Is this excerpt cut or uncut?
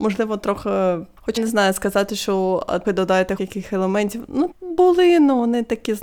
cut